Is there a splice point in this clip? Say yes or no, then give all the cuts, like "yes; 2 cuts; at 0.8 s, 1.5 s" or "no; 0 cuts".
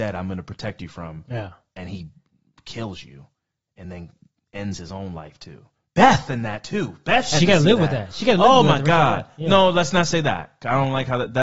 no; 0 cuts